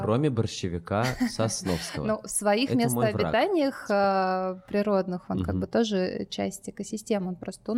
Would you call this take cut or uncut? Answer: uncut